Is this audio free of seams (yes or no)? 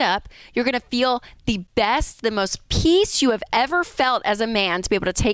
yes